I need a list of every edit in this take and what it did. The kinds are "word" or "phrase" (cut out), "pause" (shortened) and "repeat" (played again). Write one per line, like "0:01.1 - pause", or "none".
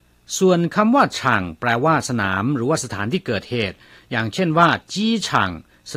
none